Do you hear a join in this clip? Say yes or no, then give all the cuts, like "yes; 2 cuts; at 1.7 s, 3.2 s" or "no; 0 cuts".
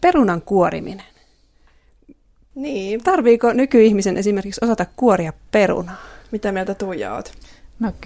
no; 0 cuts